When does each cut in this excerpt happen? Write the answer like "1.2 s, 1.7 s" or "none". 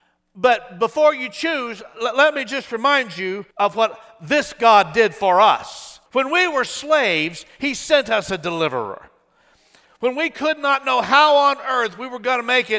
3.5 s, 6.1 s